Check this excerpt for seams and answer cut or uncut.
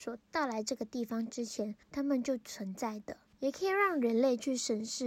cut